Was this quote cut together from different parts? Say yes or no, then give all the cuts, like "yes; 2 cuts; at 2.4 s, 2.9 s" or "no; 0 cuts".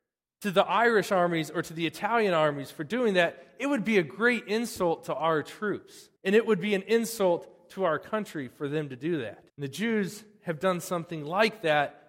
yes; 2 cuts; at 6.2 s, 9.5 s